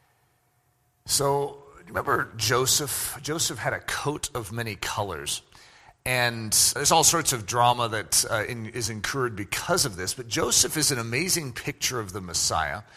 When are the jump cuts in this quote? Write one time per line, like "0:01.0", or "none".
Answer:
0:06.8